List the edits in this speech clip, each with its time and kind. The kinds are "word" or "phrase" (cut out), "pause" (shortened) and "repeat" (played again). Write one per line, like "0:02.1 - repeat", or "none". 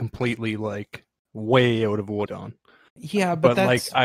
0:02.3 - phrase